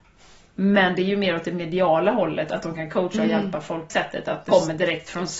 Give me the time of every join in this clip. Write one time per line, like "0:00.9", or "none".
0:03.9
0:04.5